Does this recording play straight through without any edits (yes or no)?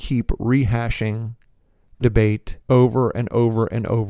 no